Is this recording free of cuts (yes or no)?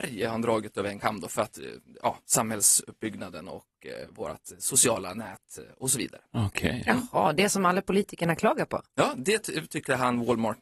yes